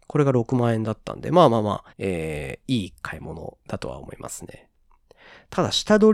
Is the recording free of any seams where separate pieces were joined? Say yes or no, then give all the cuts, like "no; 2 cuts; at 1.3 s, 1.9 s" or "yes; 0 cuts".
no; 1 cut; at 1.9 s